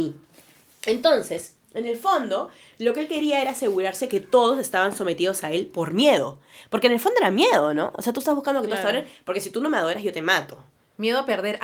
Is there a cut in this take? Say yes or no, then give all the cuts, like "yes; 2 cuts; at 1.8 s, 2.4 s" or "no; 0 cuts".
no; 0 cuts